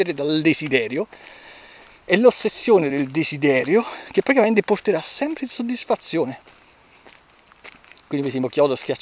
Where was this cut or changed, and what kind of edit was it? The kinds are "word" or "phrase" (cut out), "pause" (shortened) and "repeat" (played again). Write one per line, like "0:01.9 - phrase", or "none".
none

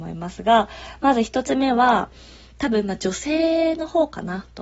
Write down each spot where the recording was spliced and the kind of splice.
none

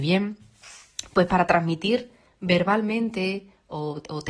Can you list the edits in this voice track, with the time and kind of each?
none

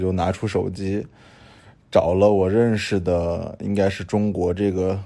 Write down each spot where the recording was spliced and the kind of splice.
none

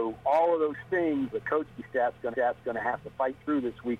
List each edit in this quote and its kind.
0:01.3 - word
0:02.3 - repeat

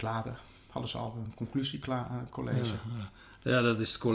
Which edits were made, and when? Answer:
none

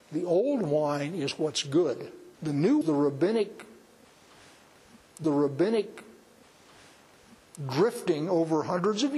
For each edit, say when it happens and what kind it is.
0:02.3 - pause
0:02.8 - phrase
0:05.2 - repeat

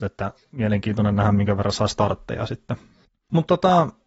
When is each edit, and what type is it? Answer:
none

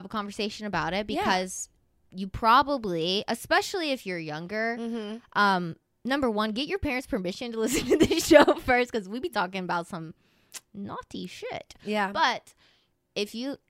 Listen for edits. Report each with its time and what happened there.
none

